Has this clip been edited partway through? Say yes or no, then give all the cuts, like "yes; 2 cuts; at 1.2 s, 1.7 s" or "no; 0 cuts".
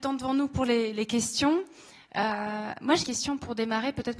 yes; 1 cut; at 3.0 s